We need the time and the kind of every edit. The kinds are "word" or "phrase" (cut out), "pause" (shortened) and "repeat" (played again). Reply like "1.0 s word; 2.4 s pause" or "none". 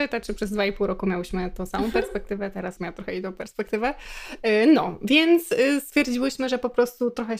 2.8 s phrase